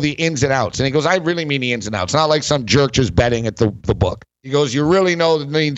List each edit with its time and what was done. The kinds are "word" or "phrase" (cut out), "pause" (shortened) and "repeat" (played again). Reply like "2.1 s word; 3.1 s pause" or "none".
4.3 s pause

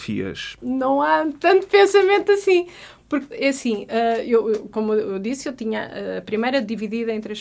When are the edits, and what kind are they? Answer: 3.3 s word

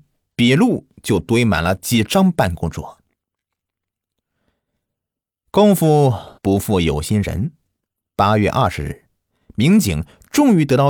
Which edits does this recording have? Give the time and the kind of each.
6.4 s pause

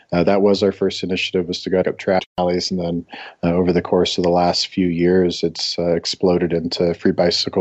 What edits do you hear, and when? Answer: 1.8 s phrase

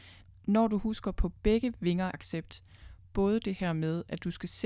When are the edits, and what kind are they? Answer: 2.1 s word

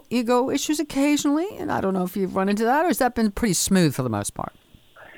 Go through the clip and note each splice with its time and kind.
none

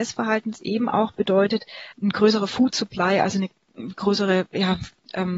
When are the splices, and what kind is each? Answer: 1.9 s word

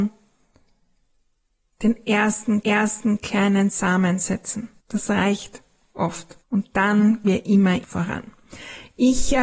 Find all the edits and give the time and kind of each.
2.6 s repeat; 4.8 s pause; 6.4 s pause; 7.2 s word; 7.8 s phrase

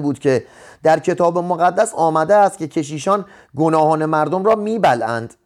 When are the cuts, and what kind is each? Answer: none

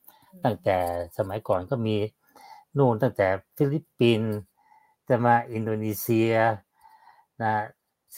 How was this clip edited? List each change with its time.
none

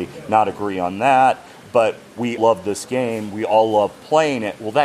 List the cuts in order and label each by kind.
2.4 s word

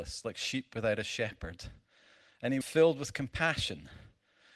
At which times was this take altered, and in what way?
2.6 s word

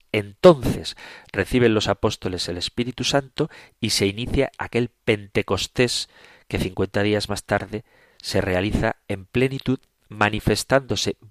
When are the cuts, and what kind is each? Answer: none

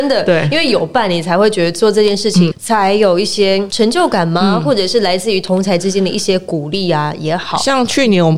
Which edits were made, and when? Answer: 2.5 s word

